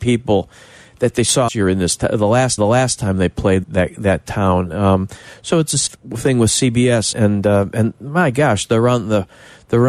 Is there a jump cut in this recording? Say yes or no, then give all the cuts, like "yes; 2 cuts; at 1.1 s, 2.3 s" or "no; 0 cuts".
yes; 5 cuts; at 1.5 s, 2.6 s, 3.6 s, 5.9 s, 7.1 s